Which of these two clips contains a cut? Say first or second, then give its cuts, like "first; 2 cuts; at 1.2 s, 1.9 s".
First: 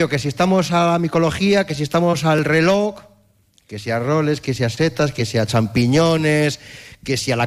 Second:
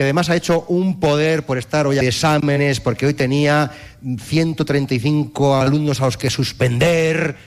second; 1 cut; at 2.0 s